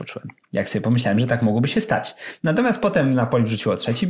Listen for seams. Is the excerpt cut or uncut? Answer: uncut